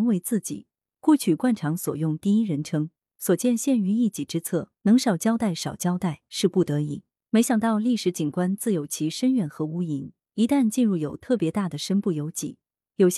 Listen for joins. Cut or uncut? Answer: cut